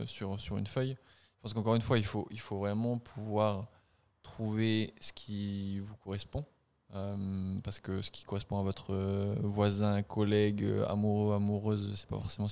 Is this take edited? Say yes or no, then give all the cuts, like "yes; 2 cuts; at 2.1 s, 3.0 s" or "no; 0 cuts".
no; 0 cuts